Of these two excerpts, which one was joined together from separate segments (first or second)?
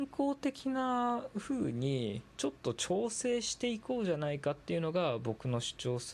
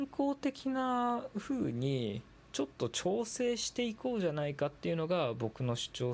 first